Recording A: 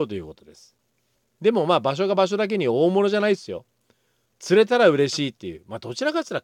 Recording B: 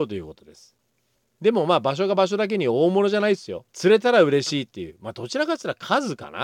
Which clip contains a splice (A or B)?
B